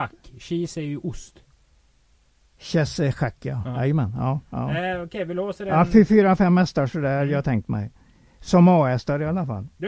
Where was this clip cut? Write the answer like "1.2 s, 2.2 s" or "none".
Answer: none